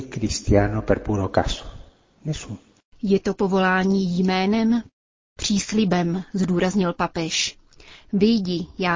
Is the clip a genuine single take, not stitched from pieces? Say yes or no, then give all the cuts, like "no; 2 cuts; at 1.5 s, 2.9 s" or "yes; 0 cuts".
yes; 0 cuts